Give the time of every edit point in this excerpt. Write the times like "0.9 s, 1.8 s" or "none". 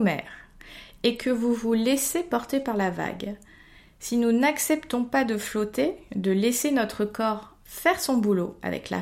none